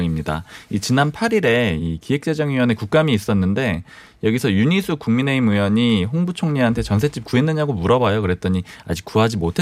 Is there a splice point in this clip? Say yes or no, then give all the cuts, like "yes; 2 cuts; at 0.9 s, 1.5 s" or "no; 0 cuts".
no; 0 cuts